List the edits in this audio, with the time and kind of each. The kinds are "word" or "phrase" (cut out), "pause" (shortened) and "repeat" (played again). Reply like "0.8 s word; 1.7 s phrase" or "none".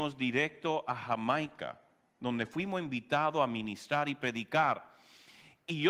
none